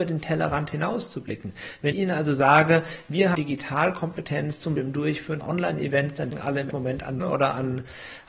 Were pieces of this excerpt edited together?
yes; 7 cuts; at 1.9 s, 3.3 s, 4.8 s, 5.4 s, 6.3 s, 6.7 s, 7.2 s

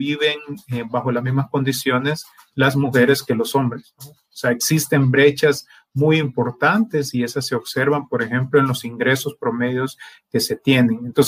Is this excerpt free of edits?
yes; 0 cuts

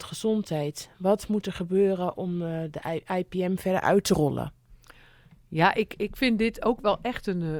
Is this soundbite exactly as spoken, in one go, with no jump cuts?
yes; 0 cuts

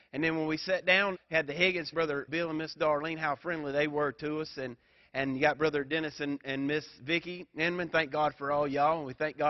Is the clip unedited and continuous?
no; 3 cuts; at 1.1 s, 1.9 s, 2.3 s

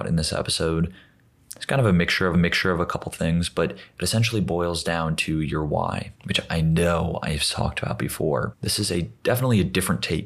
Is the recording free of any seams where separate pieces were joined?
no; 4 cuts; at 2.3 s, 6.2 s, 8.5 s, 9.2 s

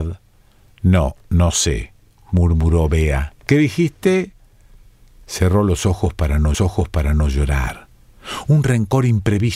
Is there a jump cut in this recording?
yes; 2 cuts; at 3.4 s, 6.5 s

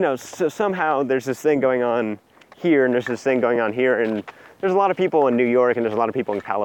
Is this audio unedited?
yes; 0 cuts

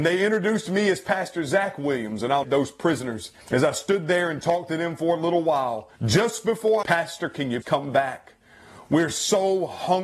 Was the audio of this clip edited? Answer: yes; 5 cuts; at 2.4 s, 3.4 s, 6.0 s, 6.8 s, 7.6 s

